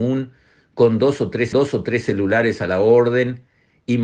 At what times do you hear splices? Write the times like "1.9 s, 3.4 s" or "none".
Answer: 1.5 s